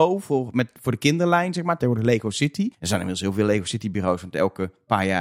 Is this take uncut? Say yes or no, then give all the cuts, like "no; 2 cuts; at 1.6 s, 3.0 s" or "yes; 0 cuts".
no; 1 cut; at 2.7 s